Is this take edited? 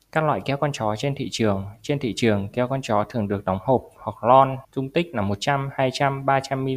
yes; 1 cut; at 4.6 s

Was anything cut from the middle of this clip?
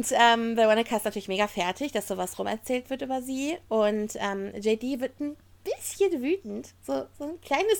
no; 0 cuts

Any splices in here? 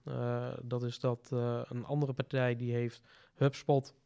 no; 0 cuts

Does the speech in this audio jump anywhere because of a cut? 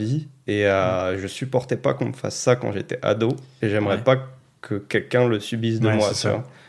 no; 0 cuts

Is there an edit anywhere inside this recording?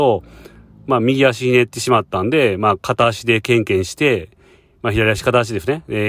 no; 0 cuts

